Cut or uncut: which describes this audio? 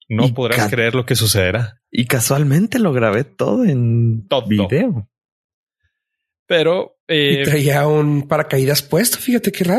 uncut